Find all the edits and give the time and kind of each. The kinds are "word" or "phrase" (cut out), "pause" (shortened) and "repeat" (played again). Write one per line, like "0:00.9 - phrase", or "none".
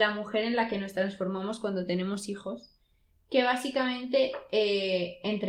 none